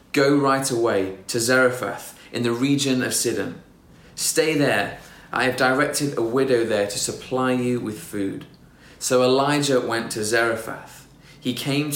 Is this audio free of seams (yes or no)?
yes